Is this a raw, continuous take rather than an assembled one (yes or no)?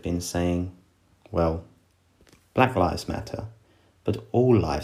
yes